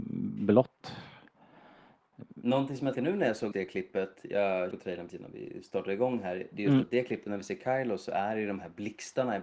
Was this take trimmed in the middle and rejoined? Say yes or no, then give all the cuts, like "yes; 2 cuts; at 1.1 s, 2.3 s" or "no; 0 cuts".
yes; 4 cuts; at 2.9 s, 3.5 s, 4.7 s, 5.1 s